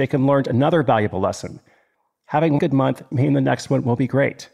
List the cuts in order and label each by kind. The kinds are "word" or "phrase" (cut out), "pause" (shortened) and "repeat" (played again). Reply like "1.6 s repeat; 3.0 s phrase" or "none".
2.6 s word; 3.1 s word